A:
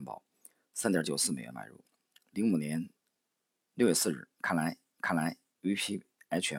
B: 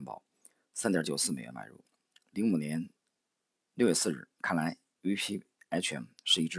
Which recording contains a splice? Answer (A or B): A